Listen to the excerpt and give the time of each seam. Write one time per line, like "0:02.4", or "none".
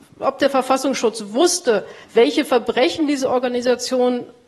0:02.0